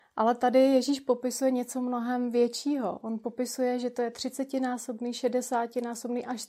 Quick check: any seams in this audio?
no; 0 cuts

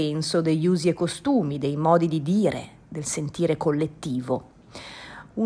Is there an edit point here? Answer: no; 0 cuts

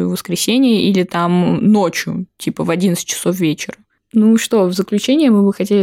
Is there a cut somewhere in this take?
no; 0 cuts

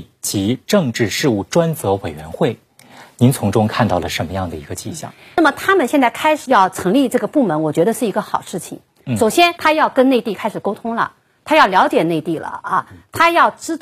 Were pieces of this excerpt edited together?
yes; 1 cut; at 9.5 s

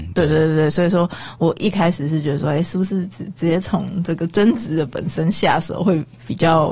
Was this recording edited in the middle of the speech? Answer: no; 0 cuts

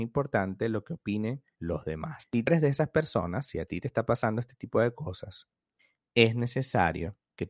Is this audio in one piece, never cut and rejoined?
no; 1 cut; at 1.5 s

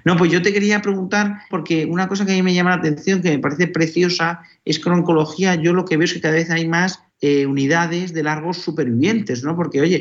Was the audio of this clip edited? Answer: yes; 2 cuts; at 1.5 s, 7.1 s

